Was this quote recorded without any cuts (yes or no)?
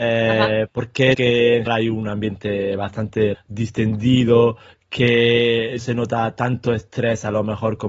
no